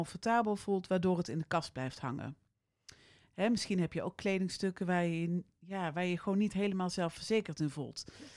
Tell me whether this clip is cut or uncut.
uncut